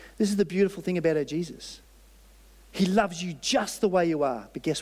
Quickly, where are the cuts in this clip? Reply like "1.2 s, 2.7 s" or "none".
none

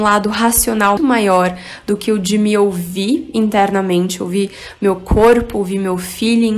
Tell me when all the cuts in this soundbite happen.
1.0 s

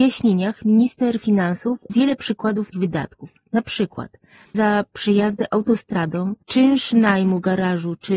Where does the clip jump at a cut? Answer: 1.9 s, 2.7 s, 4.5 s, 6.4 s

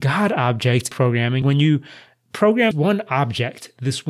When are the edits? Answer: 0.9 s, 1.4 s, 2.7 s

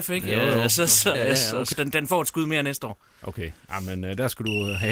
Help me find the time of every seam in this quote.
1.1 s, 1.7 s

